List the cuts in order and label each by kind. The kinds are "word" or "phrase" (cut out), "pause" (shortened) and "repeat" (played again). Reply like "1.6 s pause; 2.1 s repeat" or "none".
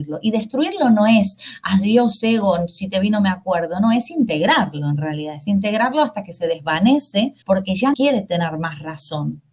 7.4 s pause; 7.9 s word